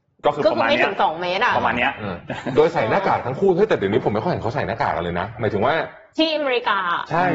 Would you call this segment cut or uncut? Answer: uncut